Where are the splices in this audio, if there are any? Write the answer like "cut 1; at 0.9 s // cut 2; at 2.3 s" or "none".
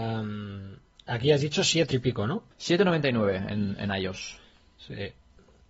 cut 1; at 0.9 s // cut 2; at 1.9 s // cut 3; at 2.5 s